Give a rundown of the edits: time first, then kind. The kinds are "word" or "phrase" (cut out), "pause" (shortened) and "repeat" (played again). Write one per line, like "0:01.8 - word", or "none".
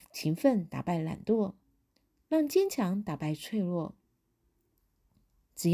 none